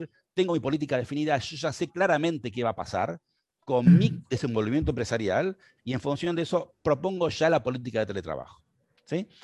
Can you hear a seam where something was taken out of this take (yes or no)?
no